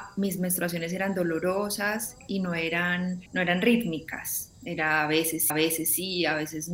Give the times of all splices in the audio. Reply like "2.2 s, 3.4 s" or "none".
3.3 s, 5.5 s

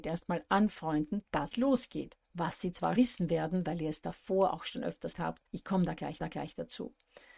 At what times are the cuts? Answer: 1.5 s, 2.2 s, 3.0 s, 5.1 s, 5.5 s, 6.2 s

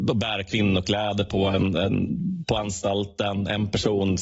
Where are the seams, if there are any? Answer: none

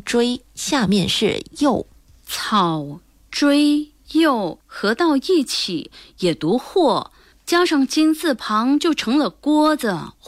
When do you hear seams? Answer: 4.6 s

